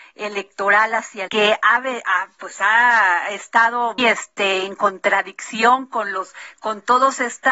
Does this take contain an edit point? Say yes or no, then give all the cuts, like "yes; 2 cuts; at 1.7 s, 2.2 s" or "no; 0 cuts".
yes; 2 cuts; at 1.3 s, 4.0 s